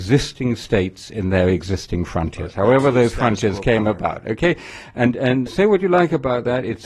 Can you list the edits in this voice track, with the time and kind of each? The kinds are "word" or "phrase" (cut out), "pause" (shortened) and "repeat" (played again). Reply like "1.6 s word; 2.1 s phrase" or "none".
5.5 s phrase